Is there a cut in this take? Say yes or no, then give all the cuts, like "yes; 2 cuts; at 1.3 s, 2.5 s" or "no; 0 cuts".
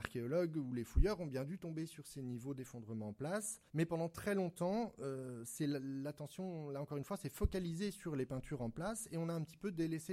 yes; 1 cut; at 3.7 s